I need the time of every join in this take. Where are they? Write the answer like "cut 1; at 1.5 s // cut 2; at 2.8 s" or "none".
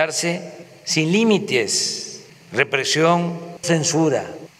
cut 1; at 3.6 s